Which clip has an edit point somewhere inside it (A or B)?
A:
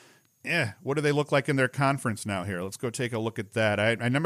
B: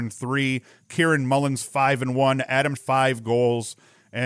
B